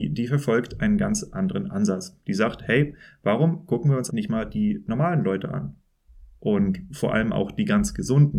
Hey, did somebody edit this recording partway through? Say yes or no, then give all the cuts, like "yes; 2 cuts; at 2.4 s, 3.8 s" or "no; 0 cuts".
yes; 1 cut; at 4.1 s